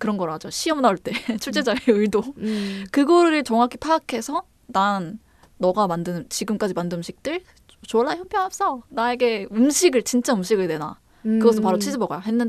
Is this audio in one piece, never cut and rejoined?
yes; 0 cuts

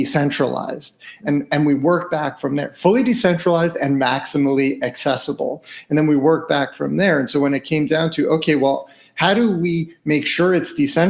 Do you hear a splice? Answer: no; 0 cuts

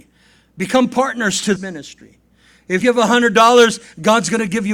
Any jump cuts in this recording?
yes; 2 cuts; at 1.6 s, 2.8 s

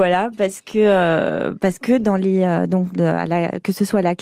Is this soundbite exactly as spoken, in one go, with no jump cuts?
yes; 0 cuts

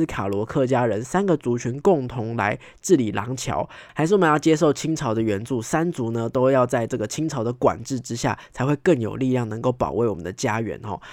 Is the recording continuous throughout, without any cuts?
yes; 0 cuts

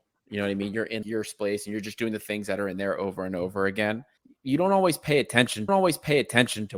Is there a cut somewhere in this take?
yes; 3 cuts; at 1.0 s, 4.2 s, 5.7 s

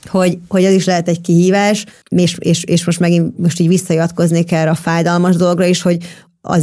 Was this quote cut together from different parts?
yes; 1 cut; at 1.9 s

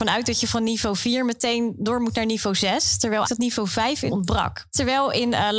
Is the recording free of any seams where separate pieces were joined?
no; 2 cuts; at 3.2 s, 4.1 s

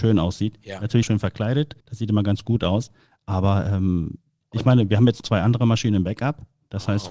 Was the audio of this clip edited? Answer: yes; 4 cuts; at 1.0 s, 1.8 s, 4.4 s, 5.2 s

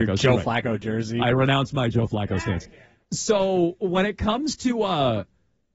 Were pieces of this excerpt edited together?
no; 0 cuts

